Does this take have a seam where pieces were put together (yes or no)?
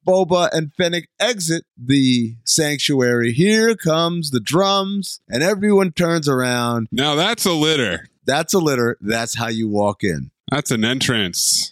yes